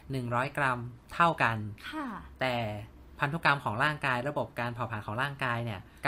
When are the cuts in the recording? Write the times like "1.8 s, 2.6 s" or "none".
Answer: 1.0 s